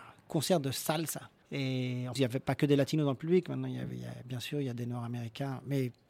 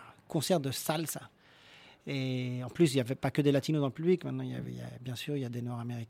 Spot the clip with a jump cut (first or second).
first